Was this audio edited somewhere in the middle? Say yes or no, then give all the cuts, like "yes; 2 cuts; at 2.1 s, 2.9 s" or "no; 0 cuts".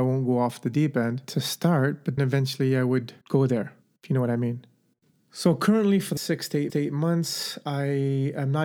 yes; 5 cuts; at 2.2 s, 3.2 s, 3.8 s, 6.2 s, 6.7 s